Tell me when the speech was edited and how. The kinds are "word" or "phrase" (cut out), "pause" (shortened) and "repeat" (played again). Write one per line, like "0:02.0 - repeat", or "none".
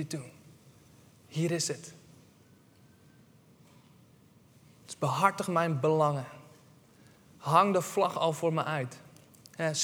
none